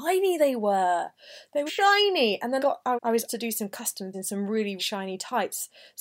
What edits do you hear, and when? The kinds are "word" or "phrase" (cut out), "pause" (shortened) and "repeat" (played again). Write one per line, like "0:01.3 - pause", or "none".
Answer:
0:01.7 - word
0:02.6 - word
0:02.9 - word
0:03.3 - word
0:04.1 - word
0:04.8 - word